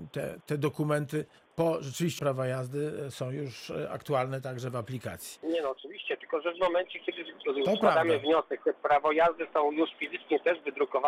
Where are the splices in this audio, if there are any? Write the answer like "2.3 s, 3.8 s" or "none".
2.2 s